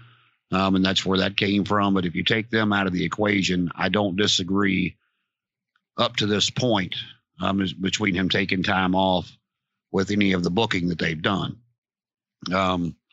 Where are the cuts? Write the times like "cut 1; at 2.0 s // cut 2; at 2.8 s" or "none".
none